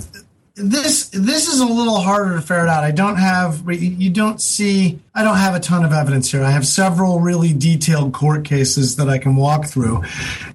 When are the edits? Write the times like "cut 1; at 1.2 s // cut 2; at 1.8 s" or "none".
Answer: cut 1; at 5.1 s

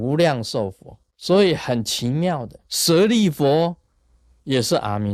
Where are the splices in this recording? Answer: cut 1; at 1.1 s // cut 2; at 2.6 s

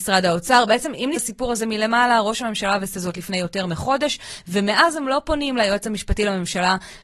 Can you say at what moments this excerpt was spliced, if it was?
cut 1; at 1.2 s // cut 2; at 2.9 s

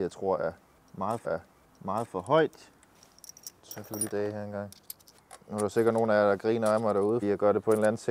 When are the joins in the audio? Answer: cut 1; at 1.2 s // cut 2; at 4.1 s // cut 3; at 7.2 s

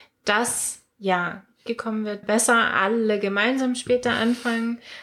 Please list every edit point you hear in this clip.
cut 1; at 1.7 s // cut 2; at 2.2 s

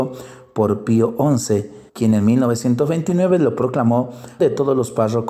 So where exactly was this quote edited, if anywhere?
cut 1; at 1.9 s // cut 2; at 4.4 s

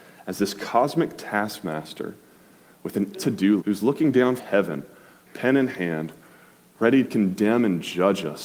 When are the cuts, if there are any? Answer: cut 1; at 3.1 s // cut 2; at 3.6 s // cut 3; at 4.4 s // cut 4; at 7.0 s

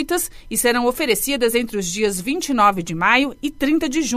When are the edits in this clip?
none

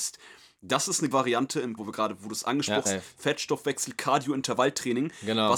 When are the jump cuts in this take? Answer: cut 1; at 1.1 s // cut 2; at 1.8 s // cut 3; at 2.8 s

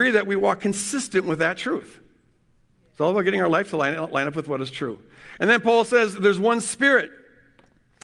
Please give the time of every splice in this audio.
none

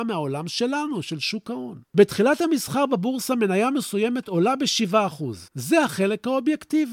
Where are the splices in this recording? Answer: cut 1; at 1.8 s // cut 2; at 5.5 s

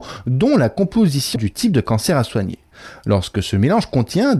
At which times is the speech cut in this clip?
cut 1; at 1.4 s

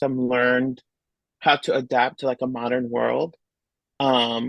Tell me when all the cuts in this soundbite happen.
none

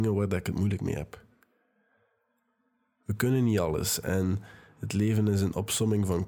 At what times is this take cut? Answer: none

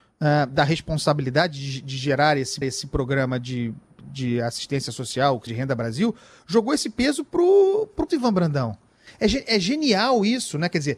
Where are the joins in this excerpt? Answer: cut 1; at 2.6 s // cut 2; at 5.5 s // cut 3; at 8.1 s

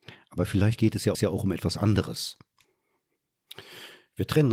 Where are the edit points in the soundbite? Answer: cut 1; at 1.1 s

